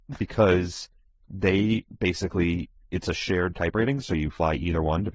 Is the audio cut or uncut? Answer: uncut